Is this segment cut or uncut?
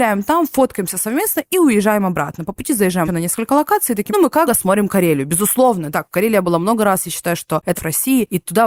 cut